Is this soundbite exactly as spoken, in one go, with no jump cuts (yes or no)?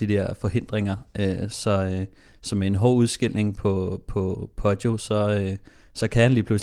yes